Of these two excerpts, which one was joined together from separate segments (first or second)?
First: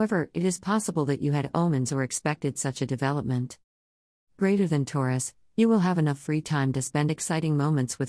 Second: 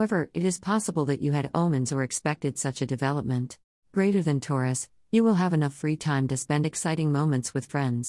second